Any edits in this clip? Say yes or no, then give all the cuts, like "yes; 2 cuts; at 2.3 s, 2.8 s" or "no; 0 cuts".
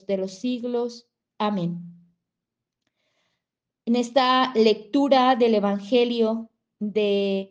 no; 0 cuts